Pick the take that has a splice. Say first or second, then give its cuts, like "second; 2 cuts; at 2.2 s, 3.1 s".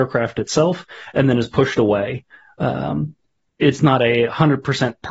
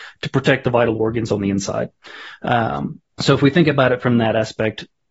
second; 1 cut; at 3.1 s